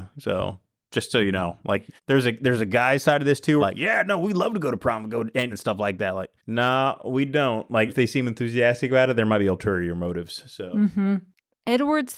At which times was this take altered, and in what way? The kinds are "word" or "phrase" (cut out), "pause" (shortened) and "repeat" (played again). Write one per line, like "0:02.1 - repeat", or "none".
0:02.0 - pause
0:03.6 - word
0:05.5 - phrase
0:06.4 - pause
0:07.9 - word